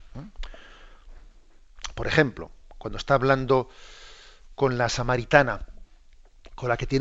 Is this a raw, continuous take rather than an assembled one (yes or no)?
yes